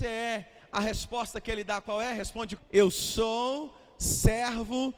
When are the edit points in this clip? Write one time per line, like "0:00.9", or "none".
0:02.6